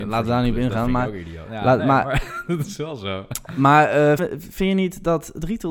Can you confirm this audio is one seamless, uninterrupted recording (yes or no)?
no